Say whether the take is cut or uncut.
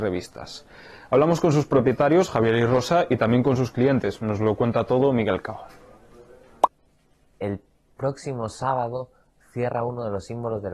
uncut